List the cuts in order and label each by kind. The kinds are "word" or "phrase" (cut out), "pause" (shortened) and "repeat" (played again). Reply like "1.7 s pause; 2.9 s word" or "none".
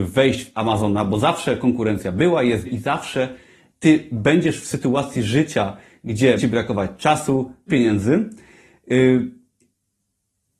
2.6 s word; 6.4 s word; 7.7 s word